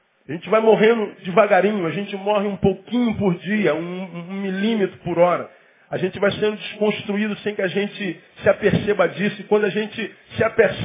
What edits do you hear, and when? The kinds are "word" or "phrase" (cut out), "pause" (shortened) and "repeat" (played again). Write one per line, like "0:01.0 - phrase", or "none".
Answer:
none